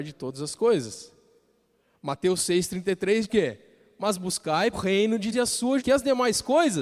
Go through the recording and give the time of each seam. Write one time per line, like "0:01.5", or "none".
0:03.2
0:04.7
0:05.3
0:05.8